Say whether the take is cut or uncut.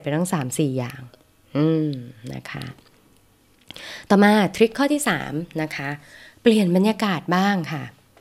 uncut